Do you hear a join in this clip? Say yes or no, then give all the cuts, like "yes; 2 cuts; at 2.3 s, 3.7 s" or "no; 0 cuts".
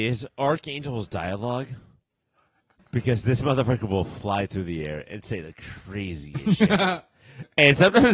no; 0 cuts